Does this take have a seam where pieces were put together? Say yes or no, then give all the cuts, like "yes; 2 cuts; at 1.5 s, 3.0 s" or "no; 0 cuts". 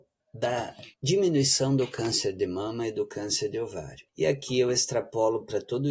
yes; 1 cut; at 0.9 s